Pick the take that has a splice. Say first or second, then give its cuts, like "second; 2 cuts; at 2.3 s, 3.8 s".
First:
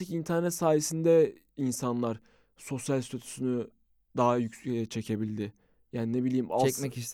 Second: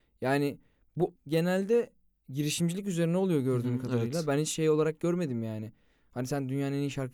second; 1 cut; at 1.2 s